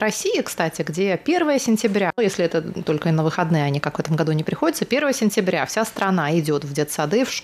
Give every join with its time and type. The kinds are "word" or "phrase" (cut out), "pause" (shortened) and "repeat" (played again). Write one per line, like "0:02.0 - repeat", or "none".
0:02.2 - word